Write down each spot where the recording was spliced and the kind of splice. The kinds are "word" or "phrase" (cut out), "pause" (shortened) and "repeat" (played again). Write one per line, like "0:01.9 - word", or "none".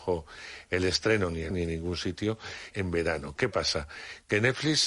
0:01.5 - word
0:02.7 - phrase